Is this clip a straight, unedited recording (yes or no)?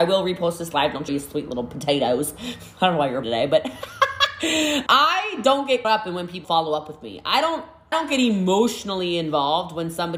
no